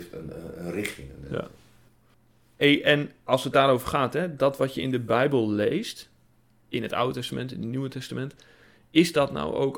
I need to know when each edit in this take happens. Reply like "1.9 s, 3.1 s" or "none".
none